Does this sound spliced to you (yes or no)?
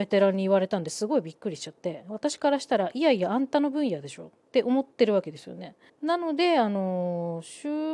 yes